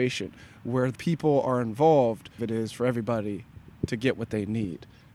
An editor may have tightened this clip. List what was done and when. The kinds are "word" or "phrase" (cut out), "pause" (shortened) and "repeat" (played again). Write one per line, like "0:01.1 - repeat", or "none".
0:01.0 - word
0:02.4 - phrase